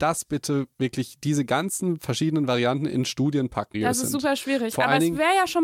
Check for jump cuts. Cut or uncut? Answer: cut